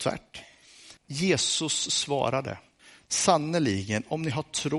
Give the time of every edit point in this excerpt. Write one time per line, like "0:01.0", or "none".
0:01.0
0:02.8